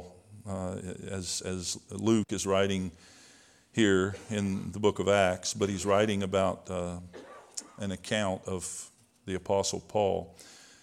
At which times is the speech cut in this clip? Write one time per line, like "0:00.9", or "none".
none